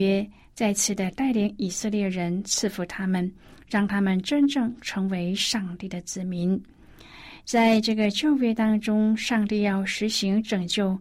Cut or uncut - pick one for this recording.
uncut